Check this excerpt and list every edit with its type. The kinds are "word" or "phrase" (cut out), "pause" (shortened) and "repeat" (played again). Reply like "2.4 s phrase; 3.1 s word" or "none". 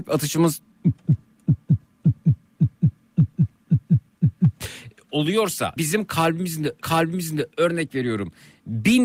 5.8 s word; 6.8 s repeat

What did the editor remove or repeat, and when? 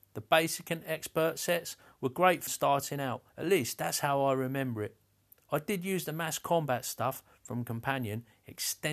2.5 s word; 3.3 s pause

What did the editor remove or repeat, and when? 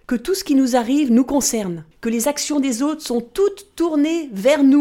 1.9 s pause

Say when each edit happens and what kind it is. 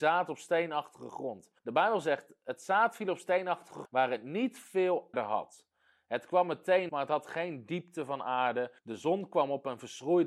1.6 s pause; 3.8 s word; 5.1 s word; 6.9 s word; 8.8 s pause

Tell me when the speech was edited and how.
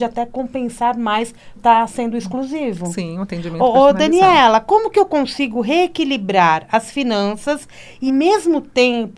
1.6 s word; 8.1 s word

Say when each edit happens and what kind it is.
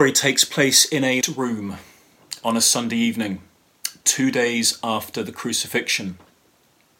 1.2 s word

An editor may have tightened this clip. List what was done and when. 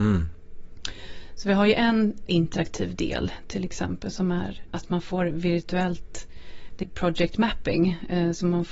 2.3 s word; 4.7 s word; 6.8 s word

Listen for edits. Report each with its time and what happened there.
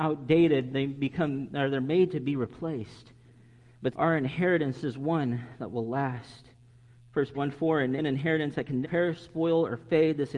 3.9 s word; 7.3 s word; 8.0 s word; 8.8 s word

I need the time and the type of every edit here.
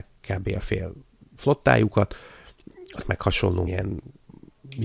3.0 s word; 3.7 s word

